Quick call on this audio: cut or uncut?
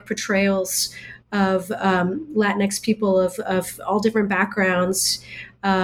uncut